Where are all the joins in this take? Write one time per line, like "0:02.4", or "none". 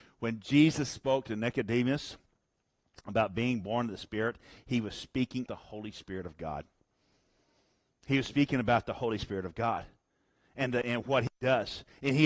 0:05.5
0:10.8